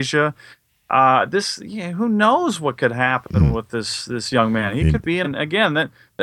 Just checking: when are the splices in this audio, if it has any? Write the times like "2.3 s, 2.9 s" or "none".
5.2 s

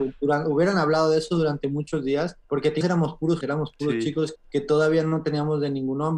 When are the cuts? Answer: 2.4 s, 2.8 s, 3.4 s, 4.4 s

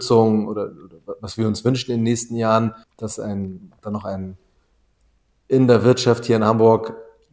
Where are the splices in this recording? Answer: 2.8 s

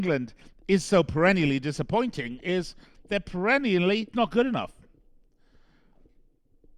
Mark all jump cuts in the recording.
4.1 s

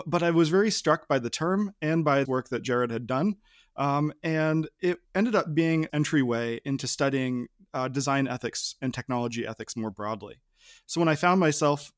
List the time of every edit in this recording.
2.2 s, 5.0 s, 5.9 s

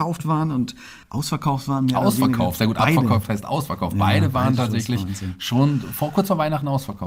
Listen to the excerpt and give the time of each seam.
1.0 s

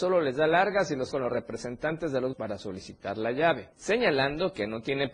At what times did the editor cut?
1.1 s, 2.3 s, 3.7 s

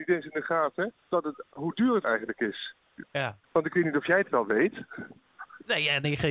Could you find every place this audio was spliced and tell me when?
1.0 s, 2.0 s, 3.4 s

